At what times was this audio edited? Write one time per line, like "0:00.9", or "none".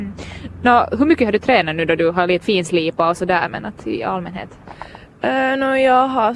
0:02.4